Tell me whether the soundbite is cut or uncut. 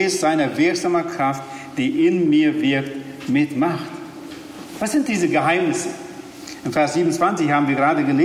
uncut